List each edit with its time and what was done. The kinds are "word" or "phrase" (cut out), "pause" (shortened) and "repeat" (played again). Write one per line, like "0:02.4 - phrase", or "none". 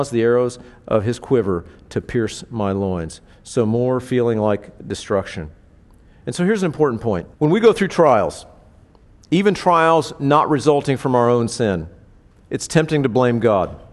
0:07.3 - pause